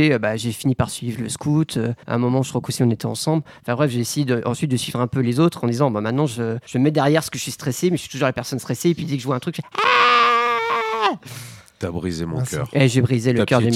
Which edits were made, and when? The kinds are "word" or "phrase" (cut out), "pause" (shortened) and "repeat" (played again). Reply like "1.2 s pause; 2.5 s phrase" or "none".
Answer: 2.0 s pause; 6.7 s pause

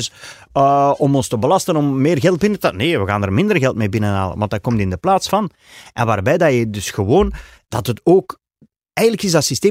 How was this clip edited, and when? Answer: none

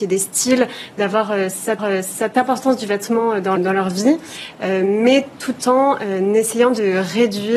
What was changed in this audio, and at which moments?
1.8 s repeat; 3.6 s word

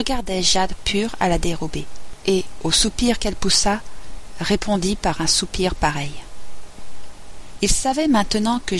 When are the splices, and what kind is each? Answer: none

